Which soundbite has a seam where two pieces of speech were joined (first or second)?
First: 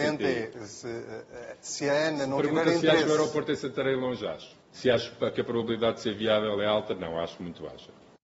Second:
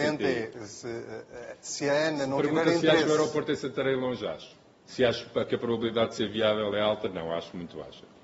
first